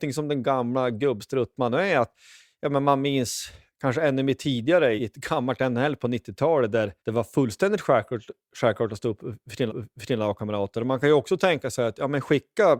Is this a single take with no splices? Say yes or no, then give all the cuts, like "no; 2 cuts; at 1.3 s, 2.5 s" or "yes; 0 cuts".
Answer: no; 3 cuts; at 5.0 s, 7.0 s, 9.7 s